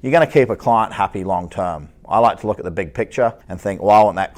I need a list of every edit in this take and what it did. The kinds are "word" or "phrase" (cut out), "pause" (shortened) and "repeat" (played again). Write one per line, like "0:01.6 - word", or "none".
0:03.4 - pause